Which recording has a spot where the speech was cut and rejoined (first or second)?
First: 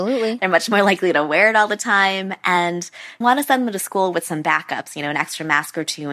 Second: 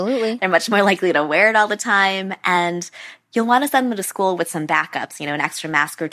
first